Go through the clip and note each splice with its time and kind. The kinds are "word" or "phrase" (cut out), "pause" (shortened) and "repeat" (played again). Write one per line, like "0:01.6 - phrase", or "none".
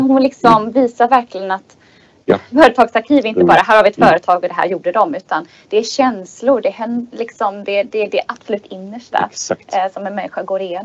none